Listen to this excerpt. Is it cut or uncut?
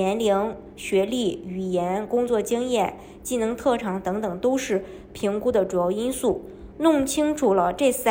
uncut